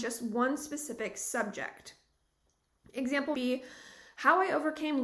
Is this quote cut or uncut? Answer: cut